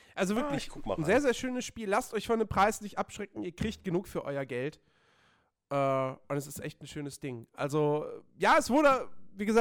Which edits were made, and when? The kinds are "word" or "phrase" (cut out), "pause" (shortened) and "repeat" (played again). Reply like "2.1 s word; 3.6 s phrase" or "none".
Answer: none